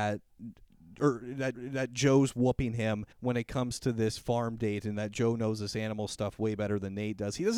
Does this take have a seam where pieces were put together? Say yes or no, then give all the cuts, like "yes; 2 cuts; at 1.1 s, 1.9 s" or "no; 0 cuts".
yes; 2 cuts; at 1.5 s, 3.1 s